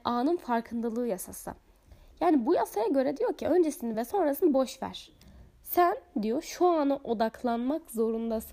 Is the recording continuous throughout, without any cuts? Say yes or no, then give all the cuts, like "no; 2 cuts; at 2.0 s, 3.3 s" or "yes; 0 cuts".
yes; 0 cuts